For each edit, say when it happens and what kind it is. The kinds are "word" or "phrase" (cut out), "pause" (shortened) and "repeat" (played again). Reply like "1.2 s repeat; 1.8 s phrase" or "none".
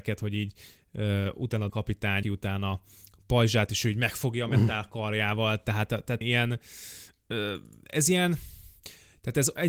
1.7 s word; 2.2 s word; 6.2 s word